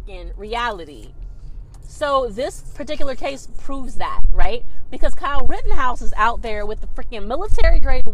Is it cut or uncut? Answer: uncut